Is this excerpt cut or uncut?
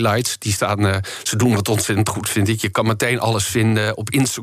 uncut